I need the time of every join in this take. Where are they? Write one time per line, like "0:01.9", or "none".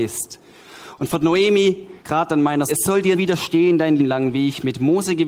0:02.0
0:02.7
0:03.1
0:04.0

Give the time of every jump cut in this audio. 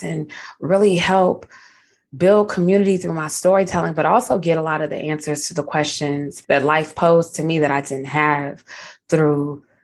0:06.4

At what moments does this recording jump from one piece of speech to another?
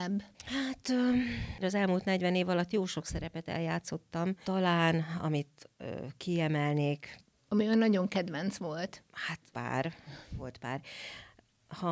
0:01.6
0:09.5

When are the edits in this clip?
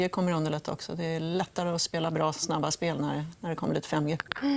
none

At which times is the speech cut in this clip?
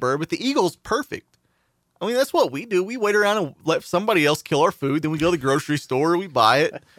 none

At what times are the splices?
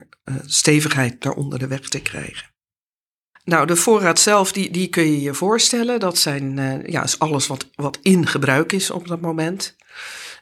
none

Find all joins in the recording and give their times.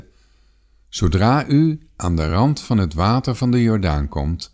none

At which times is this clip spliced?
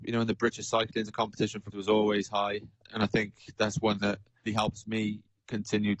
0:01.1
0:01.7
0:02.8
0:04.0
0:04.5

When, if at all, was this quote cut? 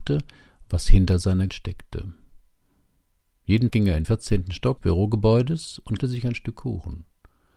0:01.5
0:03.7
0:04.0
0:04.8
0:06.0

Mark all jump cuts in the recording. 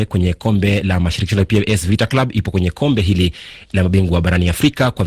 none

